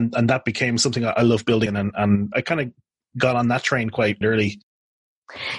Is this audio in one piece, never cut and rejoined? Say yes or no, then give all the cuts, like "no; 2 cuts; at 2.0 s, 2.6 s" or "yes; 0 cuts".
no; 3 cuts; at 1.7 s, 2.3 s, 4.2 s